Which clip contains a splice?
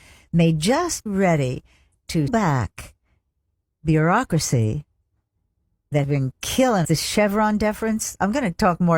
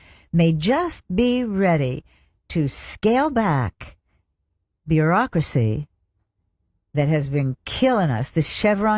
first; 4 cuts; at 1.1 s, 2.3 s, 6.0 s, 6.8 s

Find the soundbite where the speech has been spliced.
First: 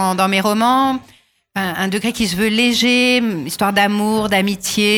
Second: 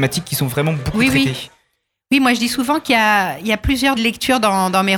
second; 1 cut; at 4.0 s

